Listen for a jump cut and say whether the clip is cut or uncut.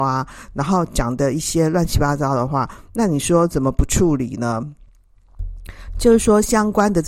uncut